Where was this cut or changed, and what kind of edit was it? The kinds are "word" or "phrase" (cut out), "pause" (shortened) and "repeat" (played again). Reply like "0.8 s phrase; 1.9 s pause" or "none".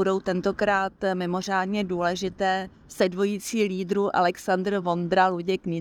none